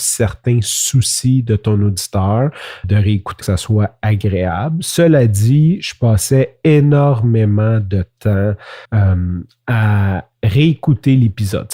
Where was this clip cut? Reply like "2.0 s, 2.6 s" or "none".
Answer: 2.8 s, 3.4 s, 8.8 s